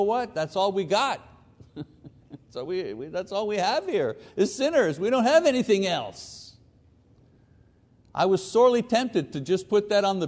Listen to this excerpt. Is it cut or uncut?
uncut